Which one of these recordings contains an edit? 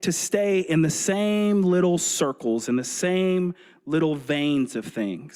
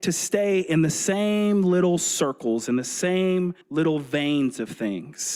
second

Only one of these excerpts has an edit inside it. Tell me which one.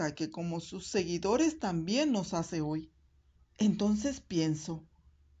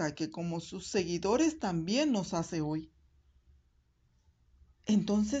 first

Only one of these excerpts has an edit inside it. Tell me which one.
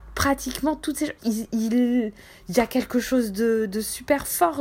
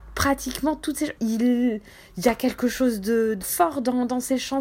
second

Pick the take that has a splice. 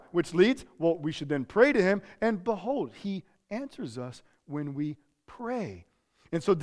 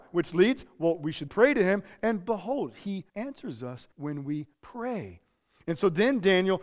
second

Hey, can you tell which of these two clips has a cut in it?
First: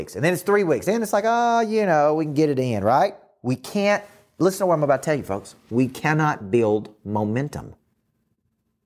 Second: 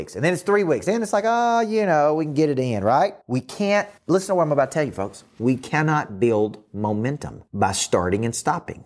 second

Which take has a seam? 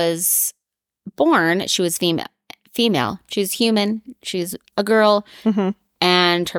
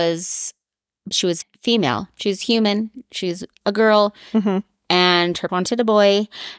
second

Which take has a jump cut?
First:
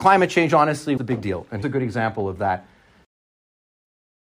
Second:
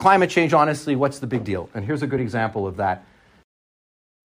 first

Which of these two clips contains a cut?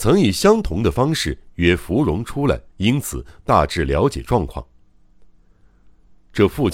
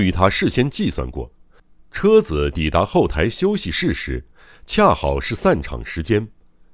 first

